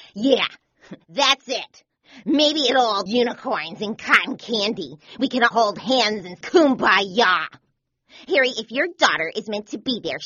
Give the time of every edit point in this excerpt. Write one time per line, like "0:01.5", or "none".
0:01.0
0:03.1
0:05.5
0:06.4